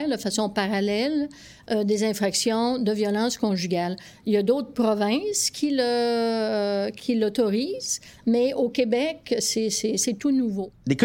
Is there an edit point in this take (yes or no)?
no